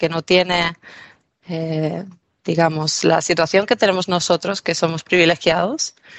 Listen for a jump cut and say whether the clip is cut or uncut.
uncut